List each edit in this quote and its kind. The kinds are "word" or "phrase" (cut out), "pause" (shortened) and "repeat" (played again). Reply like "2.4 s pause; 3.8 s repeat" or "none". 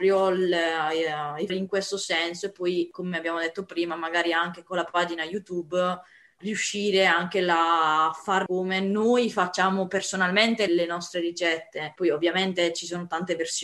1.5 s word; 6.4 s word; 8.5 s word; 10.7 s word